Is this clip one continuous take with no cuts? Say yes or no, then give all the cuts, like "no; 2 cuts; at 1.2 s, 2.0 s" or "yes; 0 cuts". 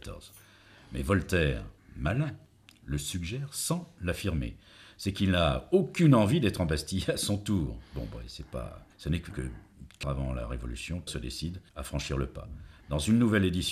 no; 6 cuts; at 1.8 s, 8.9 s, 9.3 s, 10.0 s, 11.1 s, 11.7 s